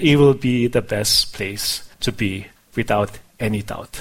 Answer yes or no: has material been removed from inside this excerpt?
yes